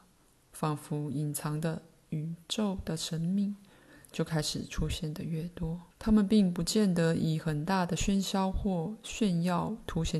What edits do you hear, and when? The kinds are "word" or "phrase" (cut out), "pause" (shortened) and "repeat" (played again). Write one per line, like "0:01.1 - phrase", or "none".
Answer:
0:05.9 - pause